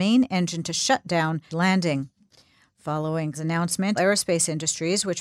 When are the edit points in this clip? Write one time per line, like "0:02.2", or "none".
0:01.5
0:03.3
0:04.0